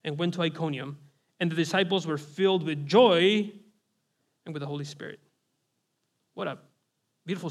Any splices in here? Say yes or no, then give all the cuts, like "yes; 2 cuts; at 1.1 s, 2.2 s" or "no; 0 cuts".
no; 0 cuts